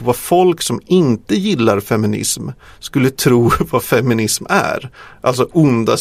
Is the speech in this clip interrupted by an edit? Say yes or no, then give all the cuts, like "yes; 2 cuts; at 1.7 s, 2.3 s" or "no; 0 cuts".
no; 0 cuts